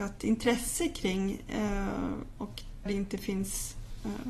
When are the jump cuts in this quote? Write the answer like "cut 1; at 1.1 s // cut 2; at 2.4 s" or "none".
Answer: cut 1; at 2.9 s